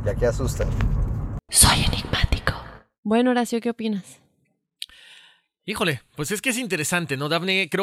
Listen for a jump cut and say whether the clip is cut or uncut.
uncut